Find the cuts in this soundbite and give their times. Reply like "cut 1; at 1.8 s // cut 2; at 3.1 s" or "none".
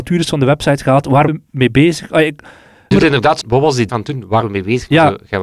cut 1; at 1.3 s // cut 2; at 2.9 s // cut 3; at 3.4 s // cut 4; at 3.9 s // cut 5; at 4.4 s